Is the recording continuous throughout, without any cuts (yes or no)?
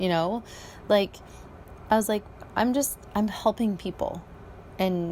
yes